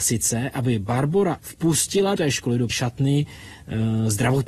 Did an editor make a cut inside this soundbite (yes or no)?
yes